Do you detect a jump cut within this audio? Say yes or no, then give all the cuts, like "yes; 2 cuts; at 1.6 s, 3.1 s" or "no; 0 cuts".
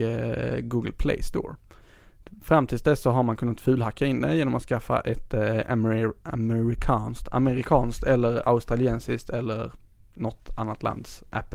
no; 0 cuts